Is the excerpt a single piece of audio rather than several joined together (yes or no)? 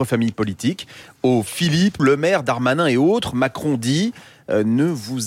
no